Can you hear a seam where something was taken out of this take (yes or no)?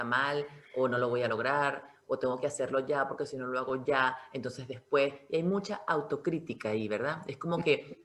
no